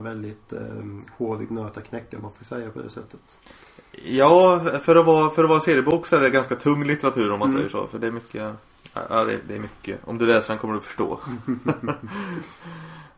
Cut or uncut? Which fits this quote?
uncut